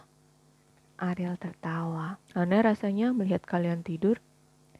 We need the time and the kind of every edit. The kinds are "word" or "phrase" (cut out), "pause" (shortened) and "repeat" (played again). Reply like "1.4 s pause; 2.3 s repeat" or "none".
2.2 s pause